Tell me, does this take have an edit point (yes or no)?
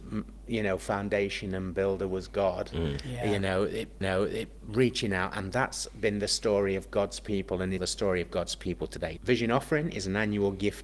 yes